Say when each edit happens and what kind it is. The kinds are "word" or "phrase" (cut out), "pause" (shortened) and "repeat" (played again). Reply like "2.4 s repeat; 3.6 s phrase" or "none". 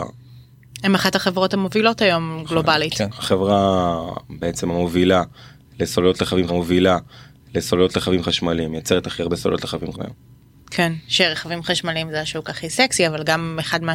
6.5 s repeat; 9.9 s word